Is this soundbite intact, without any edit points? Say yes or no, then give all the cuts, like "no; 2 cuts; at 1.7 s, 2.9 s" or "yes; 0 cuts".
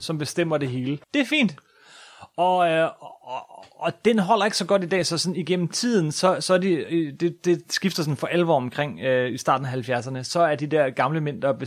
no; 1 cut; at 1.0 s